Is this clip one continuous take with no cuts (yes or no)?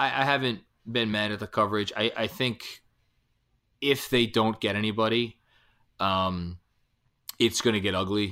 yes